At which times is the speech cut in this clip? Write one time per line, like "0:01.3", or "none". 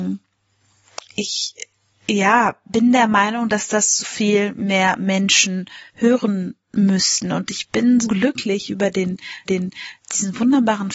0:01.0
0:04.0
0:05.9
0:08.0
0:09.5